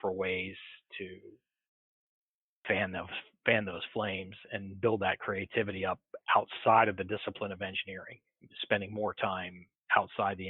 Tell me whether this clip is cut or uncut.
uncut